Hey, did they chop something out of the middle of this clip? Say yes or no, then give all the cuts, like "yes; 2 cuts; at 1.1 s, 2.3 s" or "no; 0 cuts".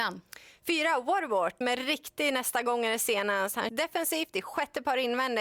yes; 2 cuts; at 1.6 s, 3.7 s